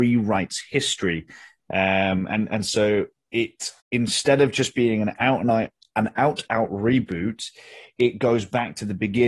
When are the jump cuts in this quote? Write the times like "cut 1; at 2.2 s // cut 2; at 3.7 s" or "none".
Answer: cut 1; at 3.8 s // cut 2; at 6.5 s